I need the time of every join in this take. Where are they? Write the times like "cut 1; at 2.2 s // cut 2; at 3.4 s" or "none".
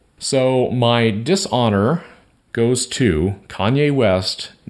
none